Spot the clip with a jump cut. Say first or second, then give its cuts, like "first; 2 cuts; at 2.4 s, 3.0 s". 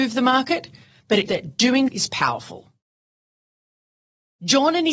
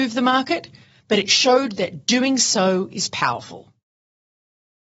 first; 2 cuts; at 1.3 s, 1.9 s